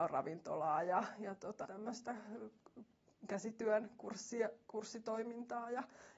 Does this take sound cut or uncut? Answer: cut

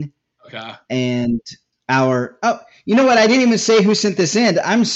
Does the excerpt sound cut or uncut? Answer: uncut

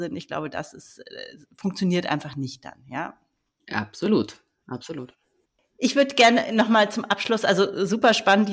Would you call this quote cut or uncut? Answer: uncut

